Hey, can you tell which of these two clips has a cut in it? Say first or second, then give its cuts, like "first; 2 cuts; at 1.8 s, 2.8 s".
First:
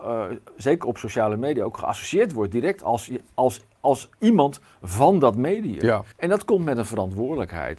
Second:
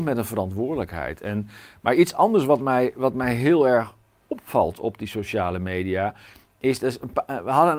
first; 1 cut; at 6.1 s